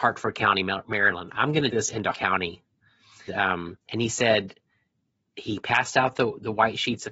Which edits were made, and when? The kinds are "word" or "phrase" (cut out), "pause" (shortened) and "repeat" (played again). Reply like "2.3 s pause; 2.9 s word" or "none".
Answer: 1.7 s word; 2.1 s word; 3.3 s word; 3.8 s pause